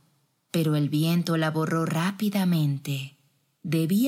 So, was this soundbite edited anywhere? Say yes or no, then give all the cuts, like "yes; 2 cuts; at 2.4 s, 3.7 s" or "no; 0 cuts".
no; 0 cuts